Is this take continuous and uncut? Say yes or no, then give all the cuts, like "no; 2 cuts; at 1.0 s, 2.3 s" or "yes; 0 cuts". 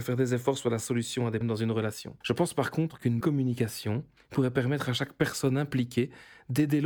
no; 4 cuts; at 1.4 s, 2.2 s, 3.2 s, 4.2 s